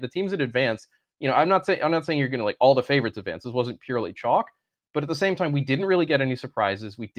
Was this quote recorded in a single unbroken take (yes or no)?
yes